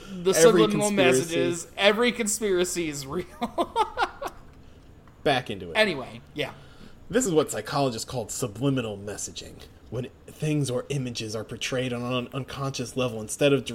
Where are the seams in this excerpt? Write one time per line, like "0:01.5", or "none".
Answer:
none